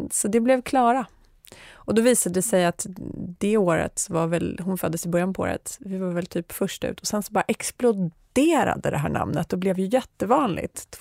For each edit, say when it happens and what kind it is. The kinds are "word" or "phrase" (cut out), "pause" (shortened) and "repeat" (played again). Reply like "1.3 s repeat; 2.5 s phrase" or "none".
none